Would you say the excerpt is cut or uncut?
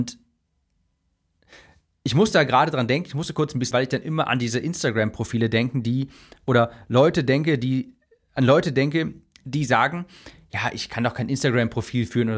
cut